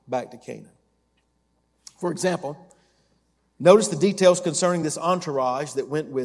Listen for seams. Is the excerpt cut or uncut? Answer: uncut